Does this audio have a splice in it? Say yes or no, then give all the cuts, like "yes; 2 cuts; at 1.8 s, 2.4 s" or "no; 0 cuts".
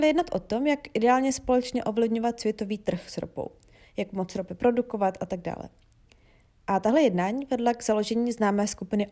no; 0 cuts